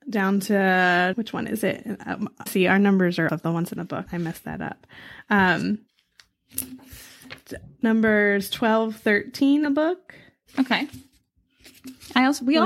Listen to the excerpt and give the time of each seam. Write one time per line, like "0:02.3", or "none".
0:01.1
0:02.5
0:03.3
0:03.8
0:04.1
0:09.7